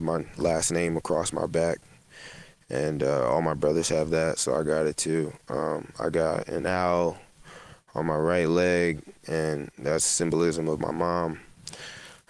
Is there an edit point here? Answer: no; 0 cuts

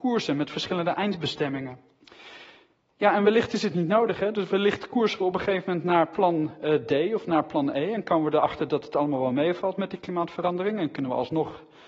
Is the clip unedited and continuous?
yes; 0 cuts

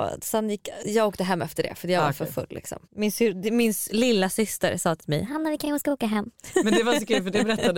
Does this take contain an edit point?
yes; 1 cut; at 2.8 s

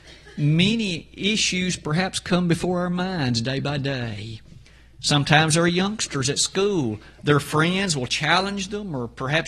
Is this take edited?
no; 0 cuts

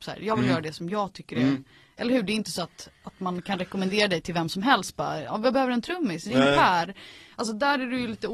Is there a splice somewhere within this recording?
no; 0 cuts

